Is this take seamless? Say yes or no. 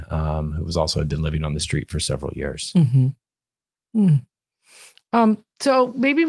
yes